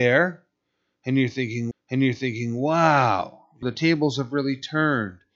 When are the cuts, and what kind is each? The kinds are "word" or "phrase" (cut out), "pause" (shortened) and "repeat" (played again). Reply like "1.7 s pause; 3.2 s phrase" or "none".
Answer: 1.7 s repeat; 3.6 s word